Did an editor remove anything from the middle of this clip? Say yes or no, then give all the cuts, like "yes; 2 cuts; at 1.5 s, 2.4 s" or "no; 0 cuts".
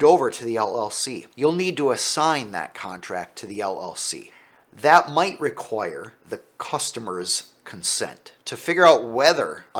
no; 0 cuts